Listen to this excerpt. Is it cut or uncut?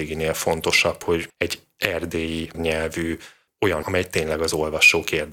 cut